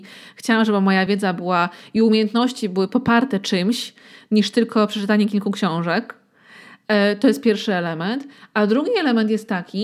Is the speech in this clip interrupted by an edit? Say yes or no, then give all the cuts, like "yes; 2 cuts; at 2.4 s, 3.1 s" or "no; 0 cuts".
no; 0 cuts